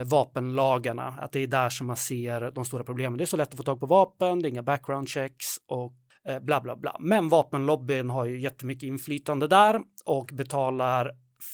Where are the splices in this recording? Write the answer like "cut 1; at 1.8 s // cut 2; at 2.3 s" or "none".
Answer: none